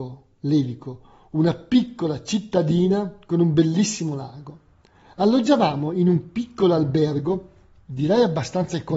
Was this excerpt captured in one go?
yes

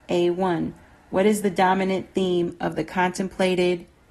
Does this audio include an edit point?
no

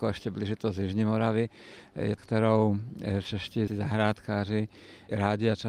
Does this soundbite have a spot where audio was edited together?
yes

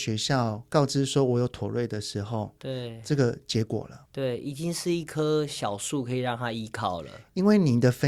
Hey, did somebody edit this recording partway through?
yes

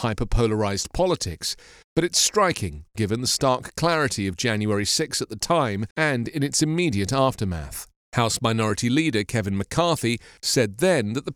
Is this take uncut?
no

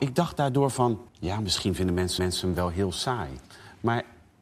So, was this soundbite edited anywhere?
yes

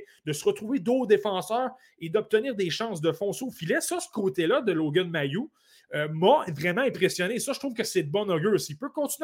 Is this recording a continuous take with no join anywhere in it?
yes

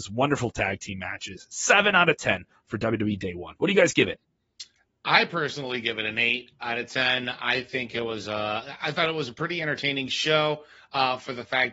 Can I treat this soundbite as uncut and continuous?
yes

